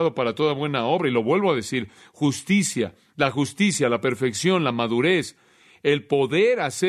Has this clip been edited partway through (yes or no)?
no